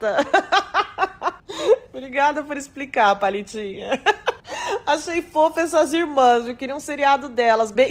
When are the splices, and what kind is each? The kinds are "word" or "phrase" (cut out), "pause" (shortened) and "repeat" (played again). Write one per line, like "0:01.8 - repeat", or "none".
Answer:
none